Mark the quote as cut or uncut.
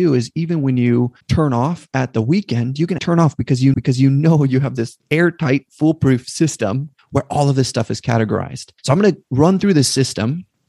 cut